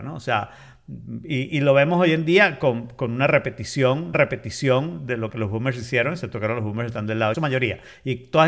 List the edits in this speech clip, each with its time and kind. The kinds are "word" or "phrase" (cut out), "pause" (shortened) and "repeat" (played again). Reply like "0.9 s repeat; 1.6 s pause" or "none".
4.1 s repeat; 7.3 s phrase